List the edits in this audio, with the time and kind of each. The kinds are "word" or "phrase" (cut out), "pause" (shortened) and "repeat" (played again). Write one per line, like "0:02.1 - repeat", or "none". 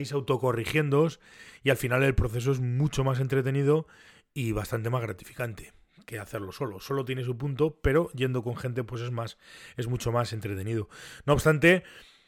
none